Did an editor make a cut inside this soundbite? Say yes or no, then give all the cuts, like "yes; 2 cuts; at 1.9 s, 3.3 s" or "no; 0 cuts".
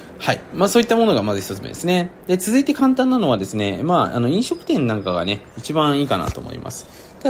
no; 0 cuts